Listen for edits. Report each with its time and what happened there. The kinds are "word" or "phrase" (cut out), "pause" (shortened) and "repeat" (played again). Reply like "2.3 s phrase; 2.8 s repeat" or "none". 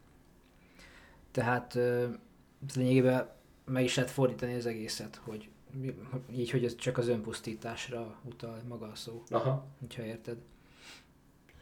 none